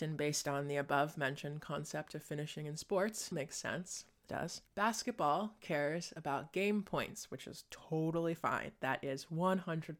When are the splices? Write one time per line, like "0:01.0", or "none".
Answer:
0:03.3
0:04.3
0:04.7

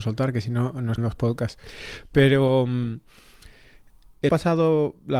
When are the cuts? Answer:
0:01.0
0:04.3

